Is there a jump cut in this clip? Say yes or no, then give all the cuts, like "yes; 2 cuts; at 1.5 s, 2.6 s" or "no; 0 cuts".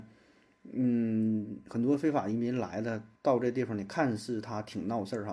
yes; 1 cut; at 3.2 s